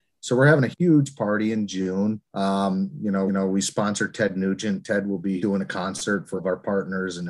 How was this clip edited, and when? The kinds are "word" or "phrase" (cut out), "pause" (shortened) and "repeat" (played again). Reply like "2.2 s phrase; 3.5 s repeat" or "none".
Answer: 2.3 s pause; 3.3 s repeat; 5.4 s word; 6.4 s word